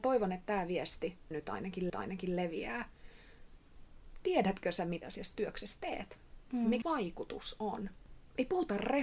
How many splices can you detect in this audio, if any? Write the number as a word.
four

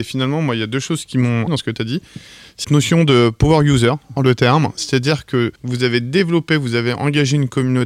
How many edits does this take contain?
four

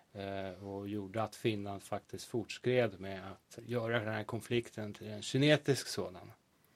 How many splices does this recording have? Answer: one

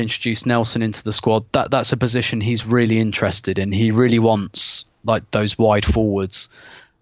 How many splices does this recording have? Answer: zero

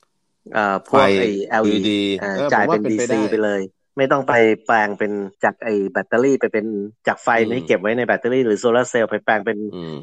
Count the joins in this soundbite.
two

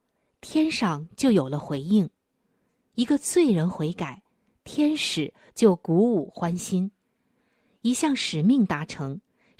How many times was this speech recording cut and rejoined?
zero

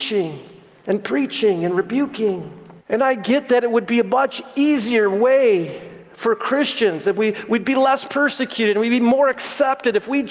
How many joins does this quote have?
one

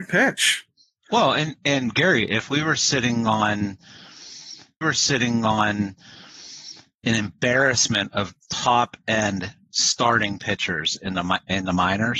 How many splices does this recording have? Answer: two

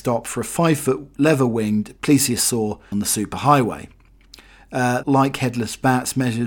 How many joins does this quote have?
two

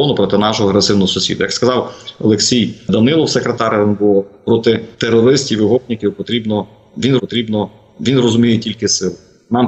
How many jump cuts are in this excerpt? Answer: two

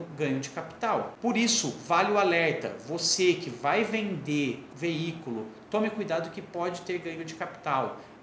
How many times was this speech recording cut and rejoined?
one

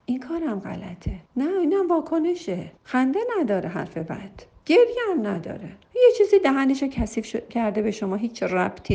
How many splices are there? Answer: three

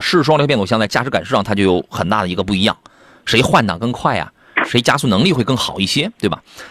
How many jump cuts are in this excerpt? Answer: zero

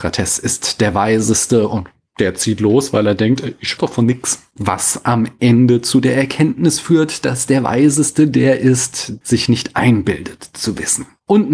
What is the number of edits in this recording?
two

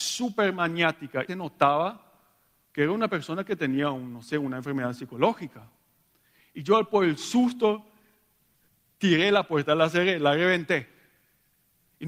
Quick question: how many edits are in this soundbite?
one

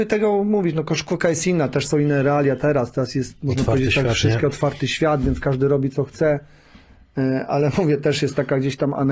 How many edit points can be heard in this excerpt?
zero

